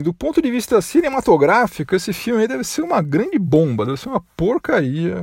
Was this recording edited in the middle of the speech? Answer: no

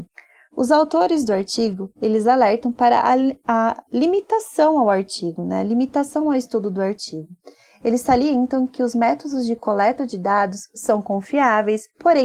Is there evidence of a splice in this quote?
no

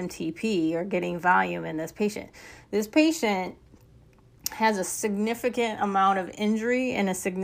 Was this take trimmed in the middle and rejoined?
no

